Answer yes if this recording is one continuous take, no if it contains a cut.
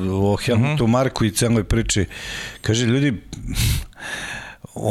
yes